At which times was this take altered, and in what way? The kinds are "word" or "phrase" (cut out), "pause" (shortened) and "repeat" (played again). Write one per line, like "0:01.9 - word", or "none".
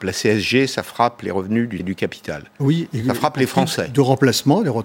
0:01.8 - word